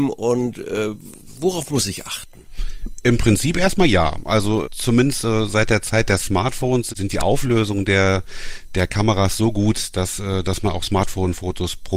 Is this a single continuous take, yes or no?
yes